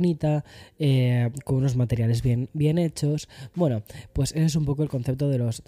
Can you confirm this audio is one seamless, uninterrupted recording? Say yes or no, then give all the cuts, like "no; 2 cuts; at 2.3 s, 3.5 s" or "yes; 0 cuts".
yes; 0 cuts